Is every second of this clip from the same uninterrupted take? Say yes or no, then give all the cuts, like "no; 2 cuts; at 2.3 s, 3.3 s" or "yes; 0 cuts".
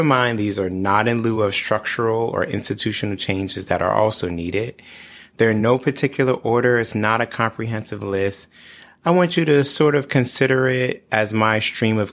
yes; 0 cuts